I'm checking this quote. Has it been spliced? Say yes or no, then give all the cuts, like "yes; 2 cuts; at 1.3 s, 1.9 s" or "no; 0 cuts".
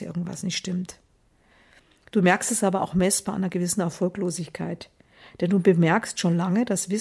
no; 0 cuts